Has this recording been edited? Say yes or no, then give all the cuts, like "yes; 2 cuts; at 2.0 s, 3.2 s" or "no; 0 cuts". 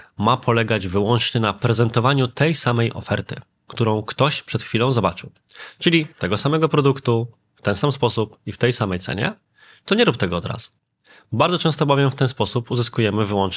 no; 0 cuts